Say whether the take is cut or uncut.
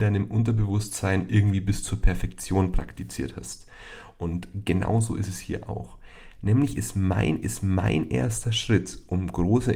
cut